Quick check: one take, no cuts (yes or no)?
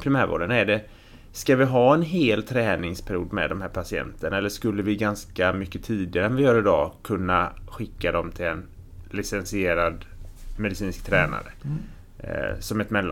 yes